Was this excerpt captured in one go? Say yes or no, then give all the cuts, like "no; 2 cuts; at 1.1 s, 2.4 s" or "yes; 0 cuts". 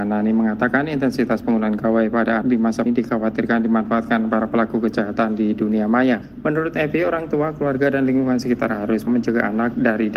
no; 3 cuts; at 2.4 s, 2.9 s, 9.1 s